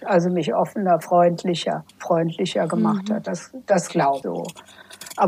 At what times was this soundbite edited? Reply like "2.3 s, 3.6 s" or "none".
1.0 s, 1.9 s, 4.2 s